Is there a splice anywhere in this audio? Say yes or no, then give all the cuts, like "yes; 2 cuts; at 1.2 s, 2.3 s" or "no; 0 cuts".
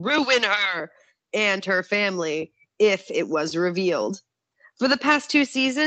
no; 0 cuts